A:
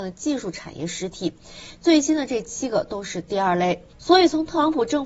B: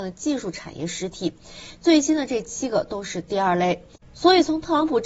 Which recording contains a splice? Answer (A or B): A